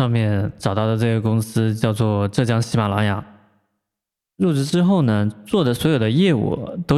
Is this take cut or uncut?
uncut